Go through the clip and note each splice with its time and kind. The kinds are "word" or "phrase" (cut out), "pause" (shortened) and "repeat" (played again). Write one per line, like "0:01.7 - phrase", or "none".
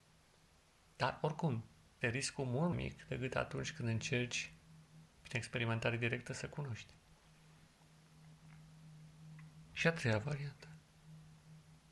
0:02.0 - word
0:02.7 - word